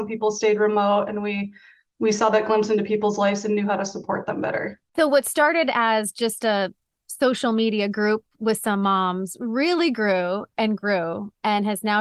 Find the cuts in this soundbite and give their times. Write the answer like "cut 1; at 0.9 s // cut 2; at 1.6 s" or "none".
none